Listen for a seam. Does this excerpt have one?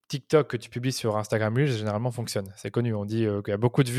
no; 0 cuts

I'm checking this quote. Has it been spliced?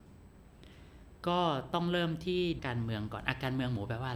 yes; 1 cut; at 2.6 s

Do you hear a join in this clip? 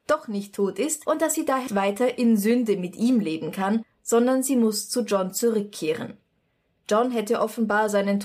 yes; 1 cut; at 1.7 s

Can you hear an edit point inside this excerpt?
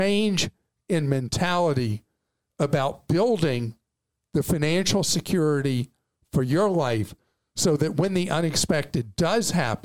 no; 0 cuts

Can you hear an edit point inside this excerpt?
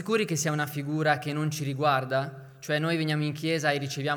no; 0 cuts

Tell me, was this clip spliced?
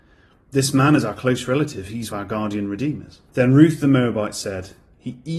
yes; 2 cuts; at 2.1 s, 3.3 s

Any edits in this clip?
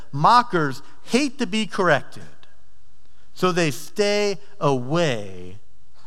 no; 0 cuts

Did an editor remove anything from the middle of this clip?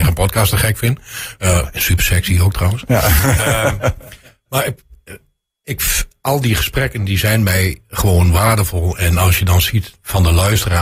no; 0 cuts

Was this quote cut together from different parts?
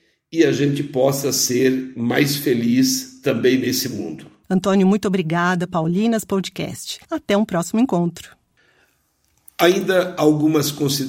yes; 3 cuts; at 4.4 s, 5.7 s, 7.0 s

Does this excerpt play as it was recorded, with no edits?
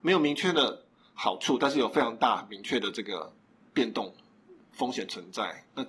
yes; 0 cuts

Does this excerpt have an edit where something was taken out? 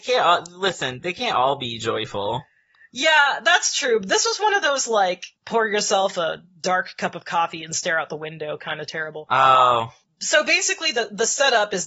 no; 0 cuts

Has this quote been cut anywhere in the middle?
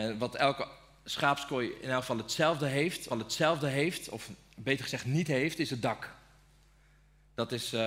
yes; 1 cut; at 3.1 s

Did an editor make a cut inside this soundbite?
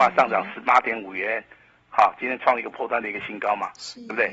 no; 0 cuts

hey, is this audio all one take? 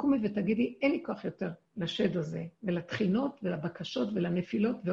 no; 2 cuts; at 1.6 s, 2.5 s

